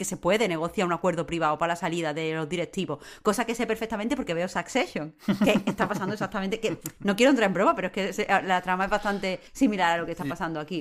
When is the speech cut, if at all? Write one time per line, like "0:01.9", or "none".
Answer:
0:09.5